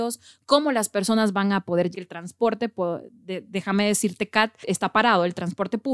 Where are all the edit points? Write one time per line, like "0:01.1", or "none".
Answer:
0:01.9